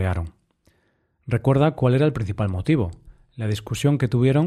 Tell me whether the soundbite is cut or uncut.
uncut